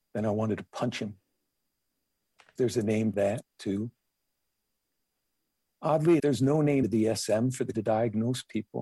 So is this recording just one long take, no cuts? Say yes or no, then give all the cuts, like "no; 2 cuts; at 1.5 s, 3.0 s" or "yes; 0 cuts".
no; 5 cuts; at 2.6 s, 3.1 s, 6.2 s, 6.8 s, 7.7 s